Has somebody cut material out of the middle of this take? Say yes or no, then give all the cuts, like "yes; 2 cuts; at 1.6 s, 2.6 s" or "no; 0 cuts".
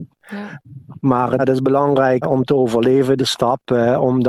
yes; 3 cuts; at 1.4 s, 2.2 s, 3.2 s